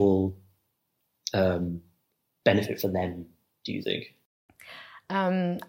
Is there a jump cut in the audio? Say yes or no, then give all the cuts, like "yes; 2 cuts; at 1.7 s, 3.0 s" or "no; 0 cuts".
no; 0 cuts